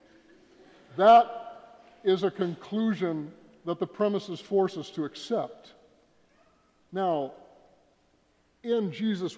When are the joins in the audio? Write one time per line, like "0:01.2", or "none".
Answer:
none